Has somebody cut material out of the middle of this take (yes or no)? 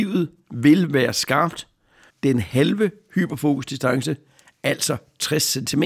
yes